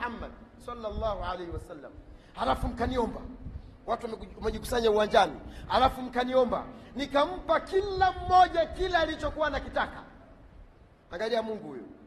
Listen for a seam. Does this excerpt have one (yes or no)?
no